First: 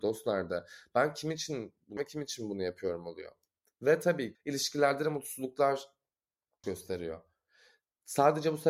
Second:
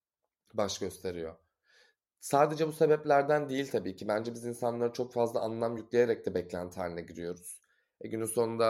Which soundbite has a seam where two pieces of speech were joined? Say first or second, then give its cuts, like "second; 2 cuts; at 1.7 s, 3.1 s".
first; 3 cuts; at 2.0 s, 4.3 s, 6.6 s